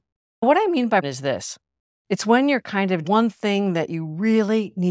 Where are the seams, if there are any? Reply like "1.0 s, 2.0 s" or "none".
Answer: 1.0 s, 3.0 s